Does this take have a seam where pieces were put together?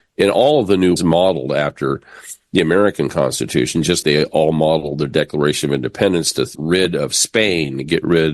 yes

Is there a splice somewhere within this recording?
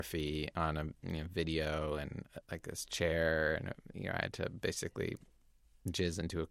no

